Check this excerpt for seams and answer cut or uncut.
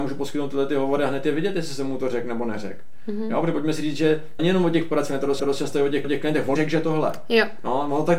cut